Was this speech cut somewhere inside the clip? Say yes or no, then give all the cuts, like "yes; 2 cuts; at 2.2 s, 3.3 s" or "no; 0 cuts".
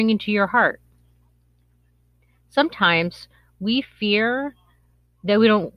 no; 0 cuts